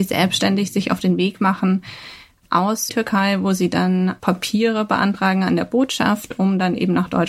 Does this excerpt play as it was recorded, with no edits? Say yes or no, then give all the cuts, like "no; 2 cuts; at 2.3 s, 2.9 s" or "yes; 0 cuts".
no; 2 cuts; at 2.9 s, 4.2 s